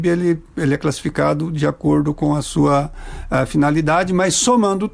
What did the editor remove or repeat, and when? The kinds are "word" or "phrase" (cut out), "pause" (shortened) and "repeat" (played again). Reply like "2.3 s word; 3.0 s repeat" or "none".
none